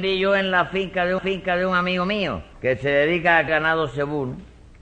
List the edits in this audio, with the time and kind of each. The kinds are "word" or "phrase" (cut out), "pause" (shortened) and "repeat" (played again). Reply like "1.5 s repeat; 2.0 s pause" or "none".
1.2 s repeat; 2.5 s pause; 3.5 s word

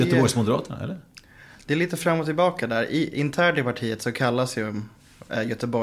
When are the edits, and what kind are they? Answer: none

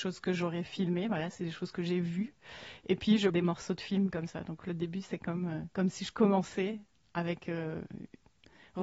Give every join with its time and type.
3.3 s phrase

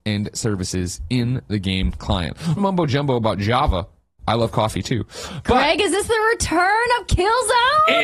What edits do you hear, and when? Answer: 2.6 s word

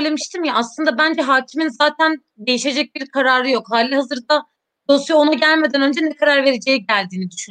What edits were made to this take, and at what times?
none

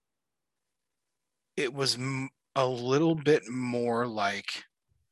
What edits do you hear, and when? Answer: none

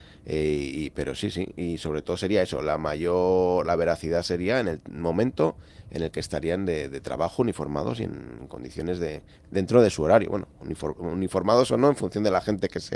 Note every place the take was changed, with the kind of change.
none

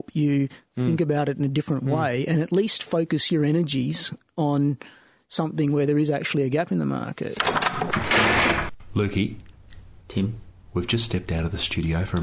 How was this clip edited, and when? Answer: none

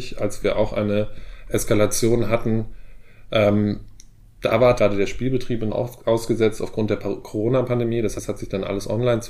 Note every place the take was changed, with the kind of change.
4.8 s word; 5.7 s word; 8.2 s word

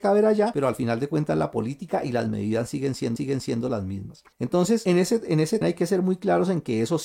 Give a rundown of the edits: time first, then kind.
3.2 s repeat; 4.3 s pause; 5.6 s phrase

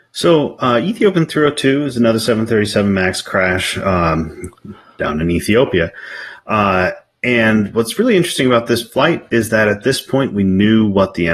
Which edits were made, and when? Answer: none

